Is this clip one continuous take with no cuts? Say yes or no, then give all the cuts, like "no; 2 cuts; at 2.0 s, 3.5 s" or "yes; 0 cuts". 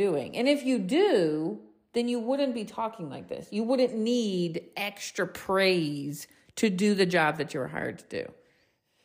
yes; 0 cuts